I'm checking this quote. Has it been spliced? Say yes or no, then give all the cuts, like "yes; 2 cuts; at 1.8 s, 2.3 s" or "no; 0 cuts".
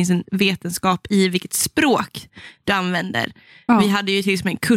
no; 0 cuts